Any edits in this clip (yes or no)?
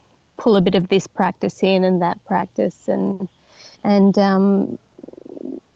yes